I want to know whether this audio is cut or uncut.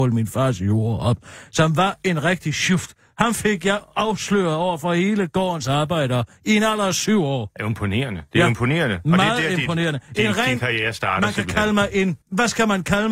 cut